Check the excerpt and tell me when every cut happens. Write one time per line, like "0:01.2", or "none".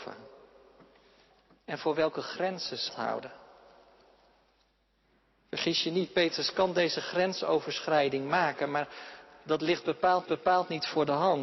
0:02.9
0:10.2